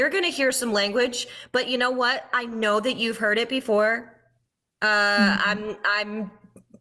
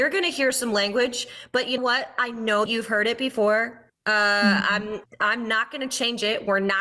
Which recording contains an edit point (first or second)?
second